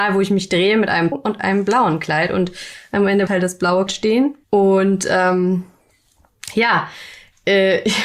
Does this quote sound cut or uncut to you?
cut